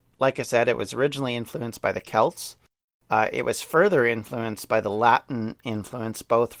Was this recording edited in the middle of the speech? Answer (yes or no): no